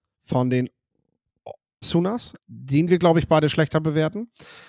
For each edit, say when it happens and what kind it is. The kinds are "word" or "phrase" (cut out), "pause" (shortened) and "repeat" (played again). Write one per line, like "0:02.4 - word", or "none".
0:01.8 - word
0:02.4 - word